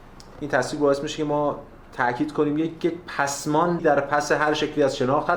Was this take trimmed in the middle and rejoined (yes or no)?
yes